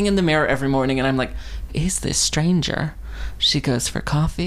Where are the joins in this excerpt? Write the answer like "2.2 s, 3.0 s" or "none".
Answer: 1.7 s, 3.4 s